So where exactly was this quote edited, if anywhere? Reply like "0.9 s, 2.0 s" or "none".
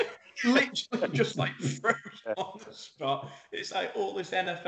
none